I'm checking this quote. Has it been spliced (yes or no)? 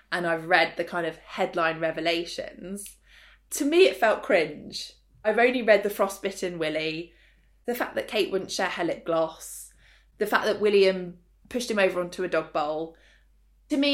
no